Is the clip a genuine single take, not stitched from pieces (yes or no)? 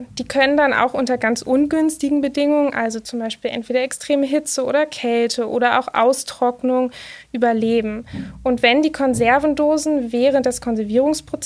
yes